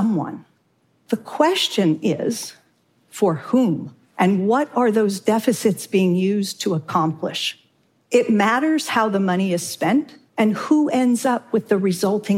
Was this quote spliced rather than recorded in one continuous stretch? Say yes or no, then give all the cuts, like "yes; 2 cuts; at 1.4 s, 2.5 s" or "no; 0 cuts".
no; 0 cuts